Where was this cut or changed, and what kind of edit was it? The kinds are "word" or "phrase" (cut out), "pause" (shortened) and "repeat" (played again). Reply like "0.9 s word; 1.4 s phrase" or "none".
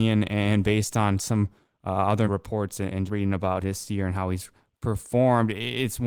2.3 s word; 3.1 s word; 3.6 s word